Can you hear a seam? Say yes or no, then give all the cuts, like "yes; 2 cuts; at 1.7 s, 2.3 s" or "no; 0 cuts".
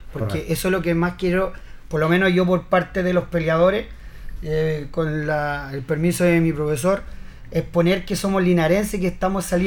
no; 0 cuts